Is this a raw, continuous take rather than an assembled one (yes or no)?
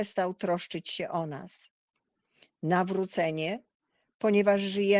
yes